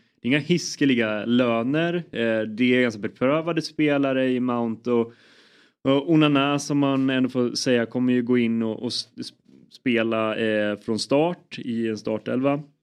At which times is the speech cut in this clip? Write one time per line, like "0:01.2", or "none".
none

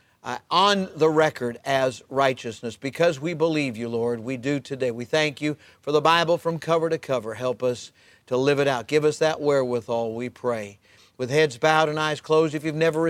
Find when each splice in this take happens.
none

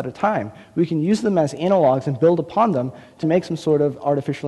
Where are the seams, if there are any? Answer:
0:03.2

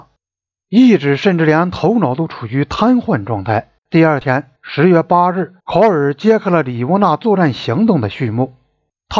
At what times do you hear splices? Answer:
0:03.8
0:04.6
0:05.6

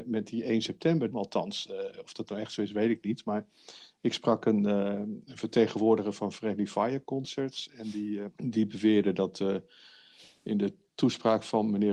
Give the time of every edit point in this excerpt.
0:01.1
0:08.3

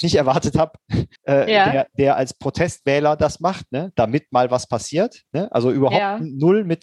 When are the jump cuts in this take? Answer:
0:01.2

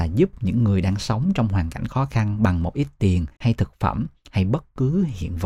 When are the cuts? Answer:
0:03.3

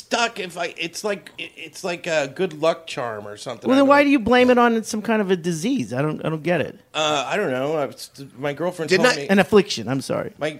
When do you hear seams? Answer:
0:01.3

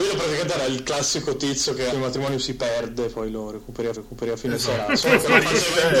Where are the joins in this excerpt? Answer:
0:01.9
0:04.0

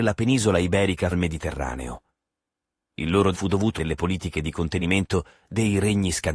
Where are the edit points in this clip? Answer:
0:01.1
0:03.3
0:03.8

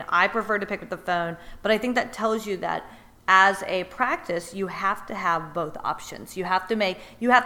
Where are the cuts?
none

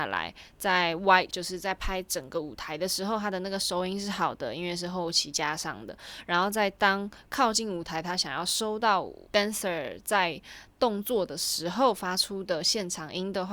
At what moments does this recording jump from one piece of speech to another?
0:01.3
0:09.2

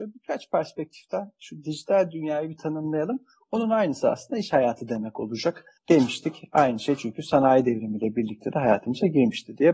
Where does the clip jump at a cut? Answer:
0:05.8

